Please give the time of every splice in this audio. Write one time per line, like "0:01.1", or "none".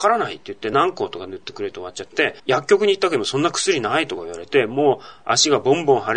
0:02.4

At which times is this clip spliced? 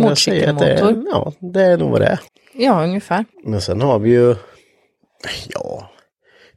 0:02.3
0:03.3

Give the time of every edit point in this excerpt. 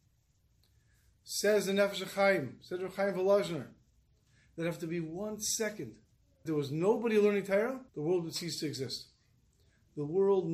0:06.5
0:07.9

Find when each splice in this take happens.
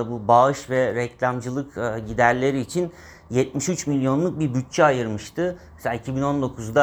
none

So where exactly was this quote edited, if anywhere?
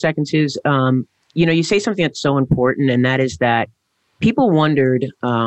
none

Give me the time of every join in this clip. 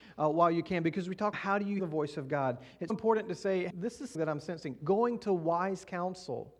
0:01.3
0:01.8
0:02.9
0:03.7
0:04.1

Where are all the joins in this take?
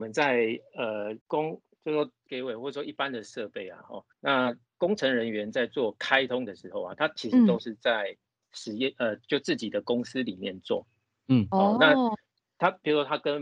0:01.2
0:02.3
0:04.1

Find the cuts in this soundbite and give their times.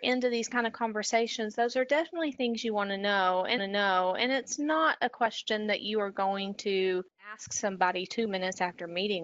0:03.6
0:07.1

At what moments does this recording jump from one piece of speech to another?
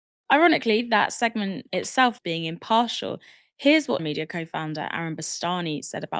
0:02.2
0:04.0

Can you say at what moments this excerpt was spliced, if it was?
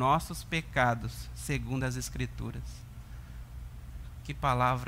none

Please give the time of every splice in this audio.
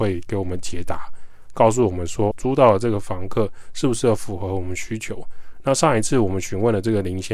0:02.3

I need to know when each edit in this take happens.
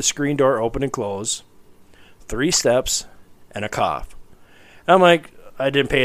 none

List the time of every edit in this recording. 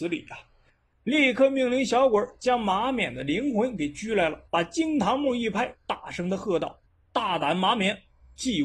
0:04.5
0:06.8

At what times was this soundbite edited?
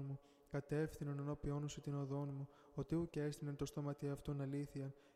none

